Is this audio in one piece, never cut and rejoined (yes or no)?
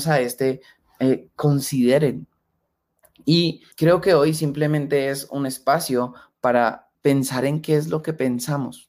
no